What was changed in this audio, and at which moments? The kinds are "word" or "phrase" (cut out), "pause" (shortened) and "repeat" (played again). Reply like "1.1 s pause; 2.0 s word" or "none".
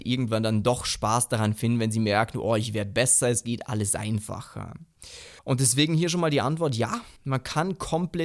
5.4 s pause; 7.2 s pause

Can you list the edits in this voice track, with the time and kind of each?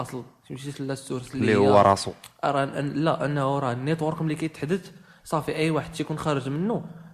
none

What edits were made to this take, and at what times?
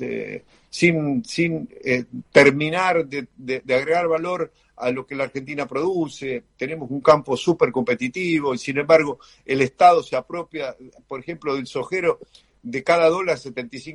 none

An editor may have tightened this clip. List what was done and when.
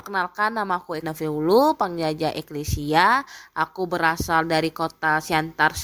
1.0 s word

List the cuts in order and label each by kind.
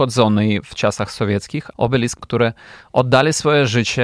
1.7 s word; 2.2 s phrase

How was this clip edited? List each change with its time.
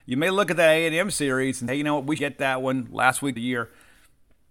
1.7 s word; 2.2 s word; 3.4 s word

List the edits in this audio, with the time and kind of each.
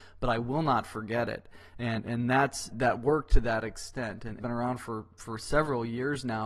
2.7 s word; 4.4 s phrase

